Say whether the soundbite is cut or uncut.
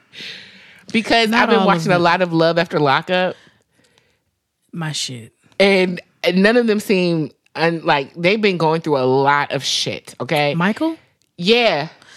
uncut